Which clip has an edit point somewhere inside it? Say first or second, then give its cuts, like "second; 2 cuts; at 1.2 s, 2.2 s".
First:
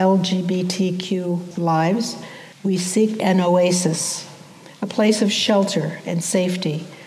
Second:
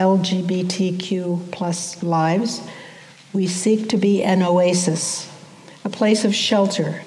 first; 3 cuts; at 1.5 s, 2.5 s, 3.2 s